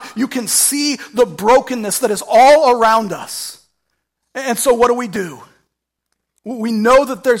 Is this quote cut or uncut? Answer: uncut